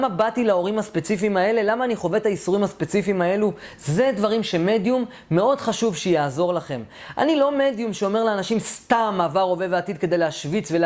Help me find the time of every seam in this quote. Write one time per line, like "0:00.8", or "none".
none

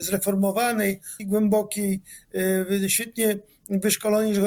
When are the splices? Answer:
0:01.2

